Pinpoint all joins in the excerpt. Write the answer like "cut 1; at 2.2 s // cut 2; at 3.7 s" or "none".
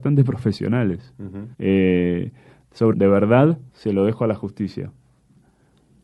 cut 1; at 1.5 s // cut 2; at 2.9 s // cut 3; at 3.7 s